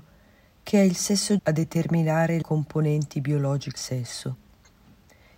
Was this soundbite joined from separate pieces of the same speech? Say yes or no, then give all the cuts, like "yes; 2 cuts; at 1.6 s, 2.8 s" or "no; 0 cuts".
yes; 3 cuts; at 1.4 s, 2.4 s, 3.8 s